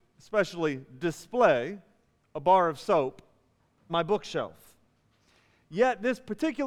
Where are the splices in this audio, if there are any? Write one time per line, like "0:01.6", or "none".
0:03.9